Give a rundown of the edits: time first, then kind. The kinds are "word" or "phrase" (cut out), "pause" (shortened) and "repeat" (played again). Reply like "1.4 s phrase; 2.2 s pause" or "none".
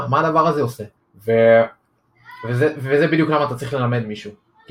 1.0 s pause